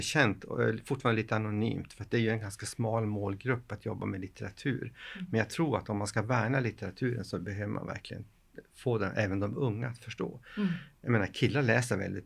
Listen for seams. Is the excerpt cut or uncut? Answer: uncut